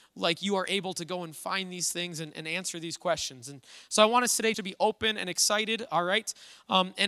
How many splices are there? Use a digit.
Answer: 1